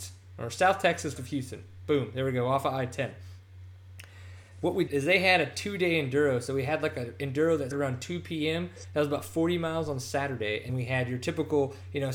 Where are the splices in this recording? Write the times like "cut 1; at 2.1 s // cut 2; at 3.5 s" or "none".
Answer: cut 1; at 1.2 s // cut 2; at 4.9 s // cut 3; at 7.7 s // cut 4; at 10.7 s